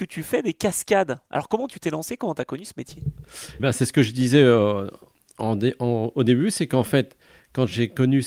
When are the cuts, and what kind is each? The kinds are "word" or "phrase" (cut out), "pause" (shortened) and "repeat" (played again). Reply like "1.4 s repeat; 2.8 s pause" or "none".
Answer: 3.6 s word